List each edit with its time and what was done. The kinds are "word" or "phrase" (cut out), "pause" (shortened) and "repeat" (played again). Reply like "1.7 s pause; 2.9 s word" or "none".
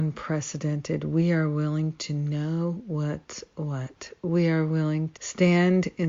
5.1 s word

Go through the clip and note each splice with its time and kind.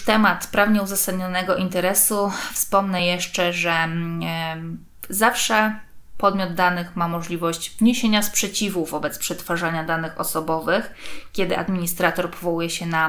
none

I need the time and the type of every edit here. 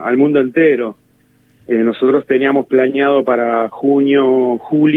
none

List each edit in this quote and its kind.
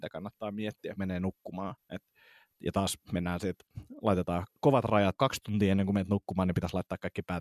1.0 s phrase; 1.8 s pause; 4.5 s word; 5.2 s word

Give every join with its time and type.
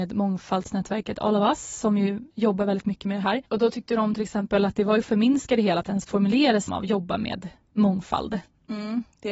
2.3 s pause; 6.7 s phrase

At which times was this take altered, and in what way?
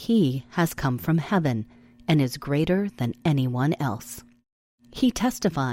none

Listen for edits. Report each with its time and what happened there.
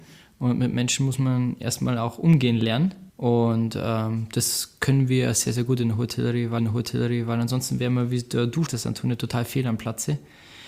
3.1 s pause; 6.6 s repeat; 8.7 s phrase

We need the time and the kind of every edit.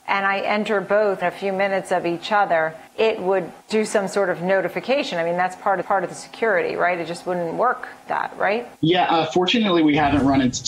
1.2 s word; 2.9 s pause; 3.6 s pause; 5.8 s repeat; 8.1 s word; 8.8 s pause

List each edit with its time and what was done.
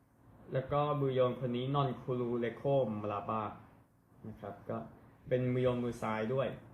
4.1 s pause

